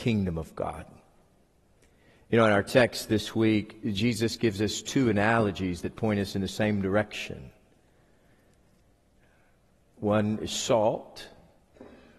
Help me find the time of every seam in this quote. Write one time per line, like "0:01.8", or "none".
none